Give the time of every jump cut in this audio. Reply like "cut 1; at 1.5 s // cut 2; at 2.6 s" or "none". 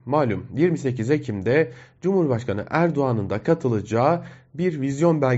none